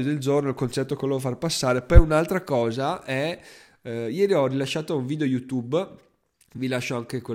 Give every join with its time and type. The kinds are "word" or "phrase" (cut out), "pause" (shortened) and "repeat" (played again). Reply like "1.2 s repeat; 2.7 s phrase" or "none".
none